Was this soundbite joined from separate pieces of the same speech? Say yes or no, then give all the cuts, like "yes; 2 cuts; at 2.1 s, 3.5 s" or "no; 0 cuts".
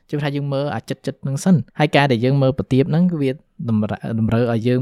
yes; 1 cut; at 1.7 s